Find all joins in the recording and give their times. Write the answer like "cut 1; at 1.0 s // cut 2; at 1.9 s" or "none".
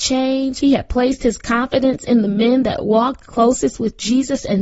none